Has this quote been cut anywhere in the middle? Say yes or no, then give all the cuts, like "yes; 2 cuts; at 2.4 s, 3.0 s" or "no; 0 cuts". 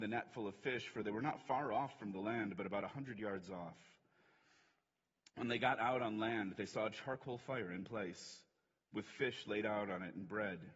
no; 0 cuts